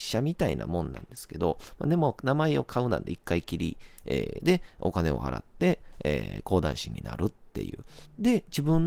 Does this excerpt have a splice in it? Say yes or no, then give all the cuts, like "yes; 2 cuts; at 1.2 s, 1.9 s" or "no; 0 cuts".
yes; 1 cut; at 7.5 s